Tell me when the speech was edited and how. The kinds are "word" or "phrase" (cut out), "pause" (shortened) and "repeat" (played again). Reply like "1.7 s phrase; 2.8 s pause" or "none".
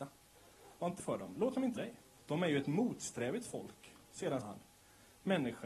1.0 s word; 1.8 s word; 2.2 s pause; 4.4 s word